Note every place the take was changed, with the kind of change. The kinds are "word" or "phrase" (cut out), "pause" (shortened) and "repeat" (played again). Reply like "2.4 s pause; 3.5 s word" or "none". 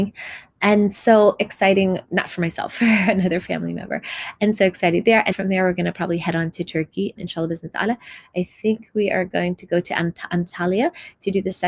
5.3 s word; 7.2 s word